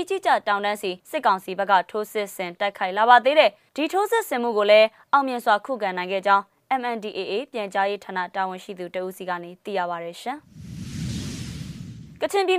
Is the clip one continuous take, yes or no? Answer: no